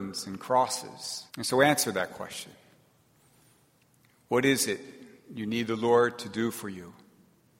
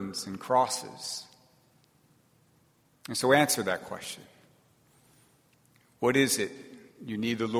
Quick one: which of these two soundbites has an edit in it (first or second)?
first